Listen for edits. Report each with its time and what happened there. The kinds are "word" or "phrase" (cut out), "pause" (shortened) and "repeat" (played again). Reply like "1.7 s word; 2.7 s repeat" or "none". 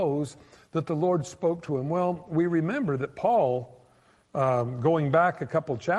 none